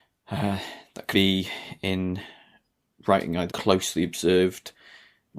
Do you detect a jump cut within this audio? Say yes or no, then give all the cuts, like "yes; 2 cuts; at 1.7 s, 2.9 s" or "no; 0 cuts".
yes; 2 cuts; at 1.1 s, 3.5 s